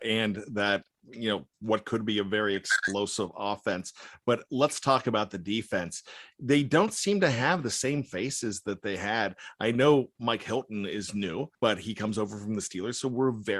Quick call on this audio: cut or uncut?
cut